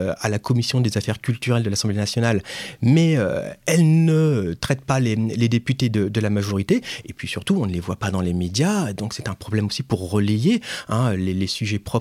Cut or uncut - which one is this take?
uncut